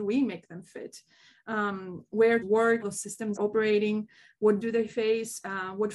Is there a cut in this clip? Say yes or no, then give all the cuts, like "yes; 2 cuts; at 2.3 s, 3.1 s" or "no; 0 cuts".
yes; 4 cuts; at 2.4 s, 2.8 s, 3.4 s, 4.6 s